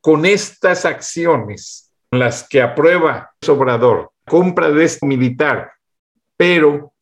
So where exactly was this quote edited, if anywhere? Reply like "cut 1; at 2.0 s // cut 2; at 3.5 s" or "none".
cut 1; at 2.1 s // cut 2; at 3.4 s // cut 3; at 4.3 s // cut 4; at 5.0 s